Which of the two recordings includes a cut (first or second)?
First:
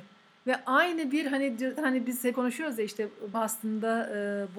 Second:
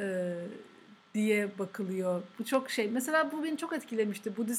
first